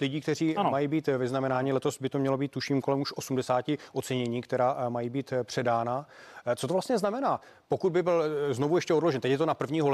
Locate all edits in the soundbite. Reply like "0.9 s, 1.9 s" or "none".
none